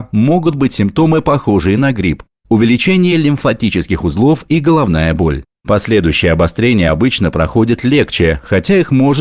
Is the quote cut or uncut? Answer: uncut